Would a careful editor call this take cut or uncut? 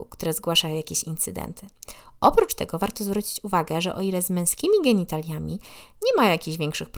uncut